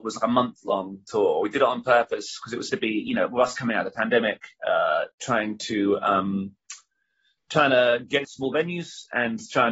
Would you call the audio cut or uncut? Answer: cut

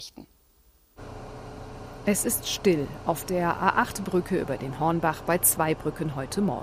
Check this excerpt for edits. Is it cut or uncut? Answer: uncut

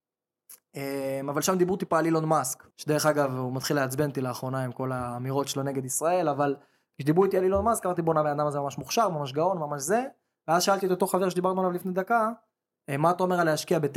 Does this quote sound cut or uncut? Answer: cut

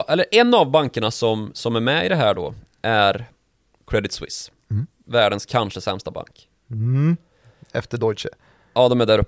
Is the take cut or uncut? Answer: uncut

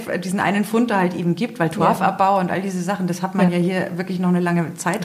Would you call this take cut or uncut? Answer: uncut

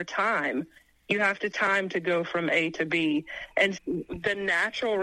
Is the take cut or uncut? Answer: cut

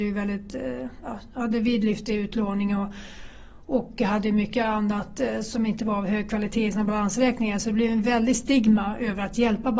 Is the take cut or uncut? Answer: uncut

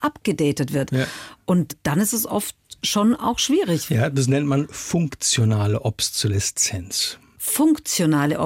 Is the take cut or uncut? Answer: uncut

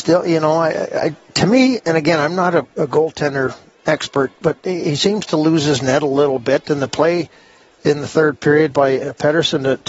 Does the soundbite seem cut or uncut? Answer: uncut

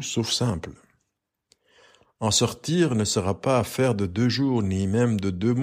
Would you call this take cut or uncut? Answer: uncut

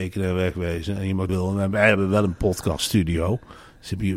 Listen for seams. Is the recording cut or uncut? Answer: cut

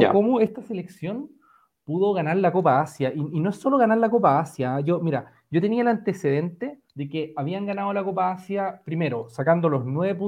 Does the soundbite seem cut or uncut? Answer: cut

